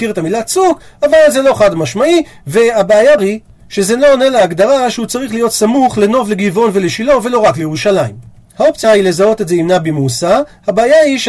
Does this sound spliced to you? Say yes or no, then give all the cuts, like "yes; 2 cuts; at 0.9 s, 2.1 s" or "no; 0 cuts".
yes; 2 cuts; at 3.2 s, 8.8 s